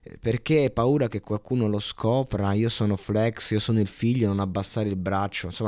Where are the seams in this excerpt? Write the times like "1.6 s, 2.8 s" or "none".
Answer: none